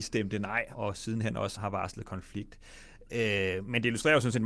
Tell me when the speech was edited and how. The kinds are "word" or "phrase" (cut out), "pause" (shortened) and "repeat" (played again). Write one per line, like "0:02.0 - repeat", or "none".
0:01.6 - word